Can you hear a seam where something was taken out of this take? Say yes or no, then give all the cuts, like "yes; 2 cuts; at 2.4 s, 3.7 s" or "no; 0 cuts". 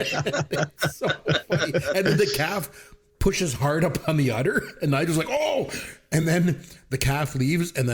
no; 0 cuts